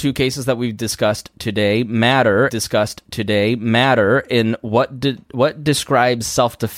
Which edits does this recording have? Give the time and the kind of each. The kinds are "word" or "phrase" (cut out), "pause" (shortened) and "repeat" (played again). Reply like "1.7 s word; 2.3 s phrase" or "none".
2.5 s repeat